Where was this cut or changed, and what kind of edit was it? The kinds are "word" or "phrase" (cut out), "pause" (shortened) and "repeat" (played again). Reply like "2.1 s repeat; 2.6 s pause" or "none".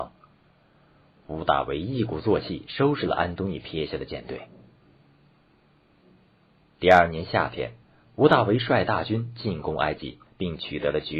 7.8 s pause